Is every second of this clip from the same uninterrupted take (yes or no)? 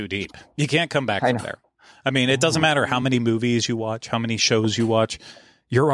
yes